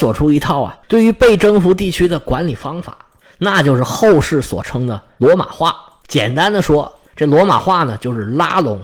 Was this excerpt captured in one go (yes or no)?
yes